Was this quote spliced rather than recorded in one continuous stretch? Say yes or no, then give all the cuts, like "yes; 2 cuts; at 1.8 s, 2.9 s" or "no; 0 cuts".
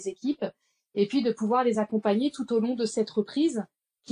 no; 0 cuts